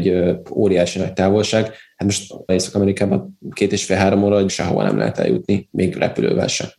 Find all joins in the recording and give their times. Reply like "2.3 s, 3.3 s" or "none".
2.5 s, 4.5 s